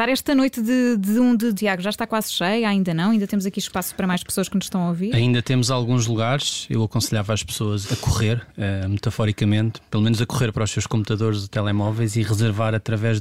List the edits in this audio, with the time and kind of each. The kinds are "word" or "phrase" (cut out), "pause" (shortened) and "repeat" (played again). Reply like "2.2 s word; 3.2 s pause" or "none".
1.5 s word; 7.8 s word; 9.9 s pause